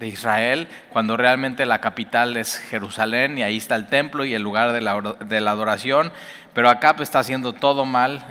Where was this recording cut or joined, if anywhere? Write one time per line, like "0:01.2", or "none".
none